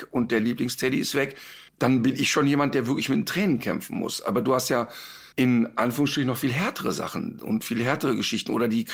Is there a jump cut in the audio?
yes; 2 cuts; at 1.7 s, 5.3 s

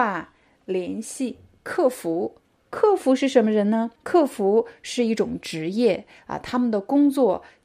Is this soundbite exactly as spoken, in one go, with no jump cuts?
no; 1 cut; at 4.0 s

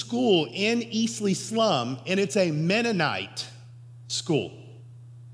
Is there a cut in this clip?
no; 0 cuts

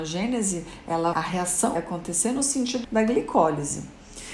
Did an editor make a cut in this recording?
yes; 3 cuts; at 1.1 s, 1.7 s, 2.8 s

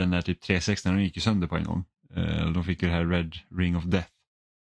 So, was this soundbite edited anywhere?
no; 0 cuts

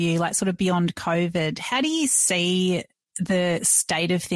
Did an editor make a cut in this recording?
no; 0 cuts

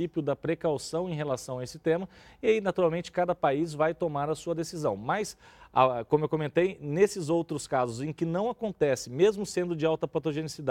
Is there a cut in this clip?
no; 0 cuts

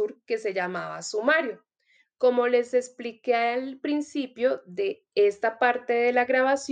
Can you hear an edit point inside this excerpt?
no; 0 cuts

